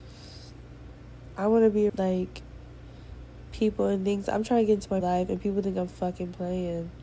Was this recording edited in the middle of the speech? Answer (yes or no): yes